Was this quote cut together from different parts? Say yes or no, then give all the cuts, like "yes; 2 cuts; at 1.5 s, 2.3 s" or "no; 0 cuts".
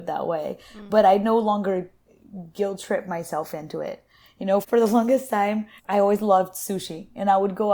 yes; 2 cuts; at 4.6 s, 5.8 s